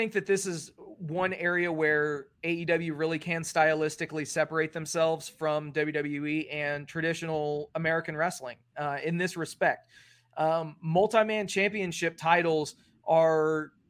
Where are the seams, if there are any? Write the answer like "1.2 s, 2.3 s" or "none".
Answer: none